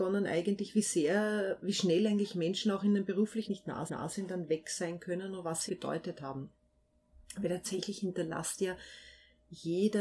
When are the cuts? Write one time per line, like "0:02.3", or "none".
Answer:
0:03.5
0:03.9
0:05.7